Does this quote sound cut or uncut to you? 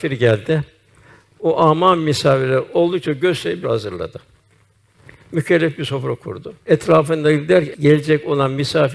cut